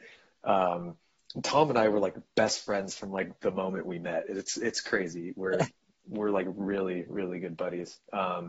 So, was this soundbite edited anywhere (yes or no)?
no